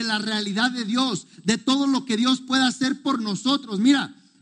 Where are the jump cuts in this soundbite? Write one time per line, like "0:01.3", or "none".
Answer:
none